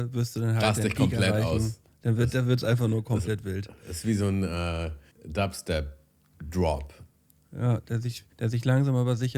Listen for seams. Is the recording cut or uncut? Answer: cut